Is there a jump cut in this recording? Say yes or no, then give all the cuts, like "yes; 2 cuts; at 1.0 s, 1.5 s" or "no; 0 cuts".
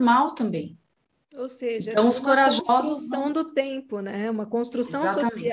no; 0 cuts